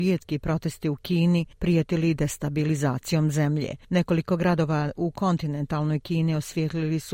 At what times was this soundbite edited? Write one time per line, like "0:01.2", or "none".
none